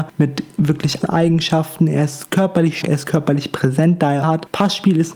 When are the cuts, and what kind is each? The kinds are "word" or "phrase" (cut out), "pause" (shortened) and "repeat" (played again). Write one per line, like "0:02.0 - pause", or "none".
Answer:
0:01.0 - word
0:02.8 - word
0:04.2 - phrase

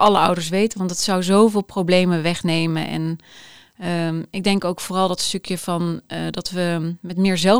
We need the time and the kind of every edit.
none

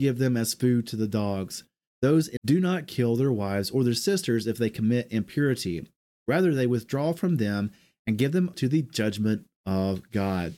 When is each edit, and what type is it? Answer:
0:02.4 - word
0:08.5 - word

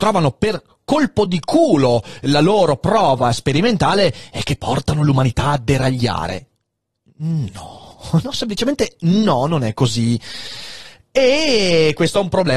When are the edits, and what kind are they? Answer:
none

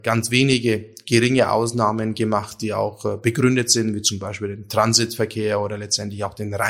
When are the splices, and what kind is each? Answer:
none

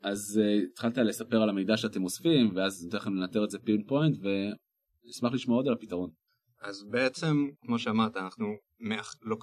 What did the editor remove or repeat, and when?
0:06.3 - pause

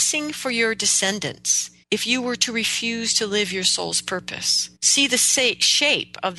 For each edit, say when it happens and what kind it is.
0:01.8 - pause
0:04.8 - pause

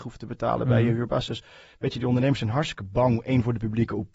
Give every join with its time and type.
none

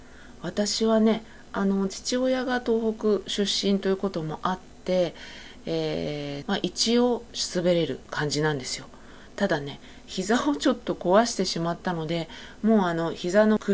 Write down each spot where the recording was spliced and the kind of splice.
0:06.4 - phrase

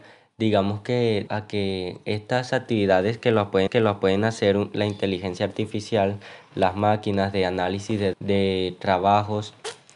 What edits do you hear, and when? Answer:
0:01.3 - word
0:03.7 - repeat
0:08.1 - word

